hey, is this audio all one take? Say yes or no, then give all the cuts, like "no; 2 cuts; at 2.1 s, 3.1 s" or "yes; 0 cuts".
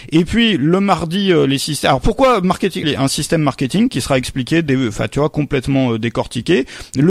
no; 1 cut; at 2.8 s